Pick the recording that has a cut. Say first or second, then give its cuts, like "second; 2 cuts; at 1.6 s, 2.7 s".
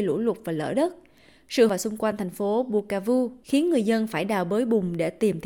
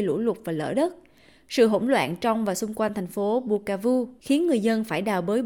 first; 1 cut; at 1.7 s